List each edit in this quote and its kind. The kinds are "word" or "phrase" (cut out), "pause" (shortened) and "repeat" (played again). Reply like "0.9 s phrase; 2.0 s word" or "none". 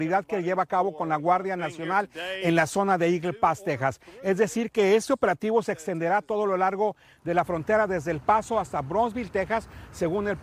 none